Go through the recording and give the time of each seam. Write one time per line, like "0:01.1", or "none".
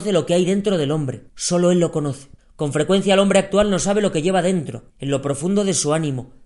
0:01.3
0:02.4
0:04.9

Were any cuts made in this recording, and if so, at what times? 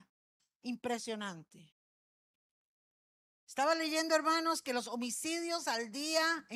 none

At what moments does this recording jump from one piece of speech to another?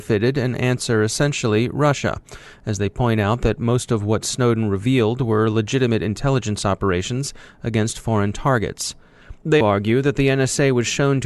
0:09.6

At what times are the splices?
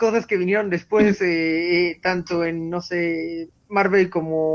none

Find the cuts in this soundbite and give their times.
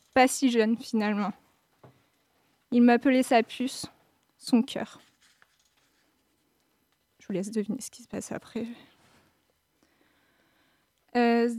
none

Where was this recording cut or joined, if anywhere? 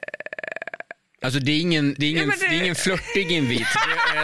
0:02.0

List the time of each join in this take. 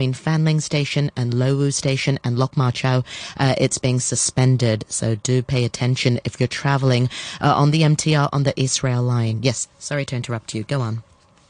none

